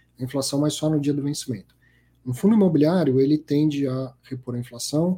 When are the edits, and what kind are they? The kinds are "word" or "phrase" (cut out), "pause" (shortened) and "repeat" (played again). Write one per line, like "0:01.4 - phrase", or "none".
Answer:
none